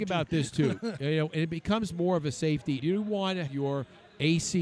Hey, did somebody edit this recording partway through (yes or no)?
yes